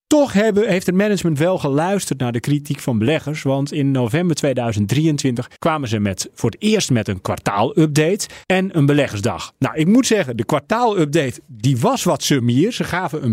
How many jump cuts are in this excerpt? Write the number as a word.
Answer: two